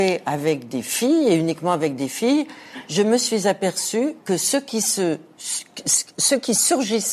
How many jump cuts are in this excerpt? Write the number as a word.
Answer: one